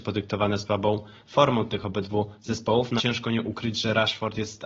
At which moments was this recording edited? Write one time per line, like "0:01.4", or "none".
0:03.0